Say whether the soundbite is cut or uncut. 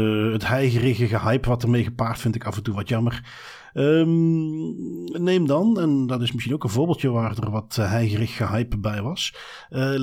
cut